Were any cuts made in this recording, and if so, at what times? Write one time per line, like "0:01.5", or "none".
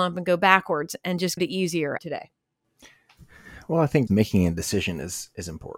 0:01.4
0:02.0
0:04.1